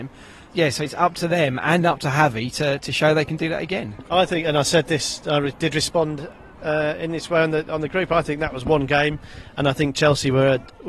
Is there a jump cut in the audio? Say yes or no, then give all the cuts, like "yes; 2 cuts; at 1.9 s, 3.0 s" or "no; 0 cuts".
no; 0 cuts